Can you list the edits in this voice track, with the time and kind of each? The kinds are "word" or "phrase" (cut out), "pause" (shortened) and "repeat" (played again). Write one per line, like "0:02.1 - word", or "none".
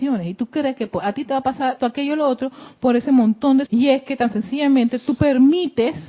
0:01.8 - word
0:03.7 - word

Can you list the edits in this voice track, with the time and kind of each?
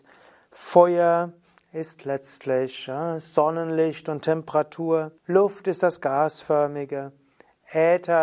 0:05.2 - pause

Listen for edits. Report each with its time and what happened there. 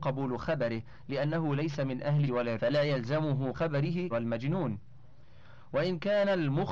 0:02.3 - word
0:02.6 - word
0:03.5 - word
0:04.1 - word

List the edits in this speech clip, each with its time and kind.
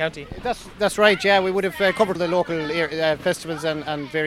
0:02.1 - word

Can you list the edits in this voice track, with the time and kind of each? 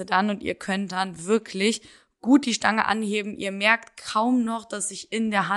none

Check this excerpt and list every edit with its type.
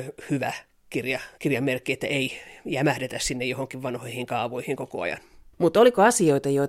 0:01.3 - pause

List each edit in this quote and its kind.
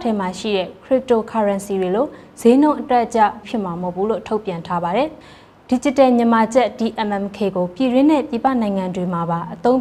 0:03.4 - word
0:05.2 - pause

